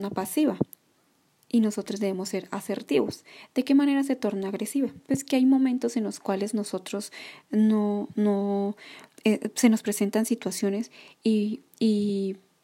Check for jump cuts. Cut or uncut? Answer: uncut